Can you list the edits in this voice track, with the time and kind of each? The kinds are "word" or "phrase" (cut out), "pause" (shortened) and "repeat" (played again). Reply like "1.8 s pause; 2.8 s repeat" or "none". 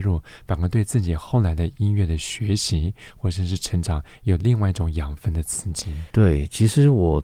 6.1 s pause